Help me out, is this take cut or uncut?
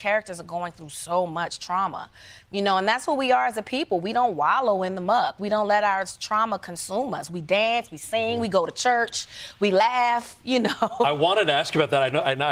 uncut